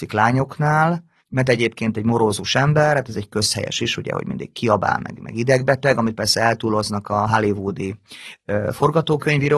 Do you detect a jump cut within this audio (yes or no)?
yes